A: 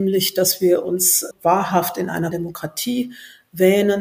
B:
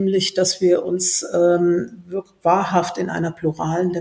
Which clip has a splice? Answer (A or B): A